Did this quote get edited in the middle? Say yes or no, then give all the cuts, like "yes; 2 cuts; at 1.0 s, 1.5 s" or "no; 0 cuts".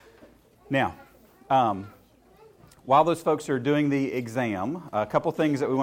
no; 0 cuts